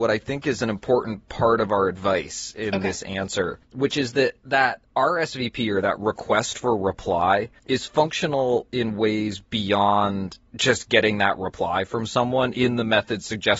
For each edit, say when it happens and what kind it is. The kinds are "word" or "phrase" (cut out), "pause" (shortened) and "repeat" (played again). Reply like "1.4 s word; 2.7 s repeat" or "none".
3.6 s pause; 4.9 s pause; 7.6 s pause; 10.5 s pause